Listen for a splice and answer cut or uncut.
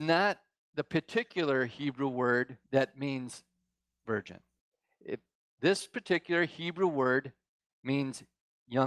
cut